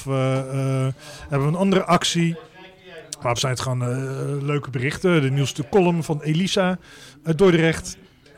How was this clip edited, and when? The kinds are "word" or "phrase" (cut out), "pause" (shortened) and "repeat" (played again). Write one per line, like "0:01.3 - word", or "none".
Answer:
0:03.4 - word